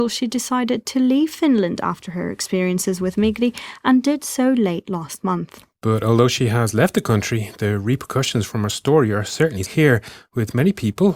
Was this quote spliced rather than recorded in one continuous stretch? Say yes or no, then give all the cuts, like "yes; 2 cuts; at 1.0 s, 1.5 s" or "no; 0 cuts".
yes; 1 cut; at 9.7 s